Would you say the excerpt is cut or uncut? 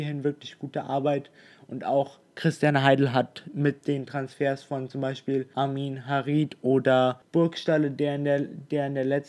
uncut